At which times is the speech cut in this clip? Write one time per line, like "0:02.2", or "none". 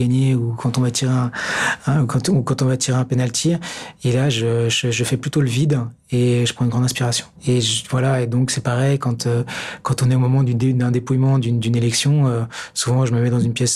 0:07.4